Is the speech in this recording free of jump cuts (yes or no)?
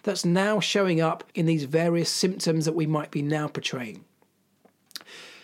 no